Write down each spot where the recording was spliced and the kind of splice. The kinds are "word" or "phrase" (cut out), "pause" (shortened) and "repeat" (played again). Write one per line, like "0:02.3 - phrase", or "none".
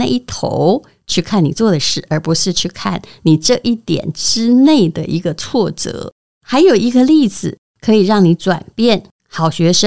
none